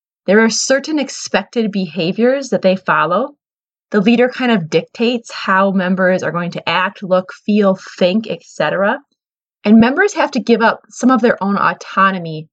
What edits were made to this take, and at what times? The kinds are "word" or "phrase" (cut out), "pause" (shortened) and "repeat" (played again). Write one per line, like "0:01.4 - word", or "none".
none